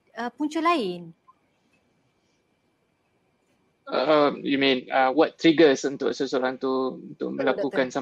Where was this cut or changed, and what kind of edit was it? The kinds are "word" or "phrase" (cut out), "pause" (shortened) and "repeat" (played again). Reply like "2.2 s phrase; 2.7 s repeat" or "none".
none